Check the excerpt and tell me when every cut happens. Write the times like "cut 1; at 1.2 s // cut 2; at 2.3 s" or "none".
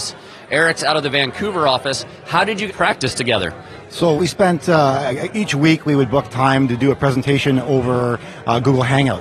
cut 1; at 2.7 s // cut 2; at 4.2 s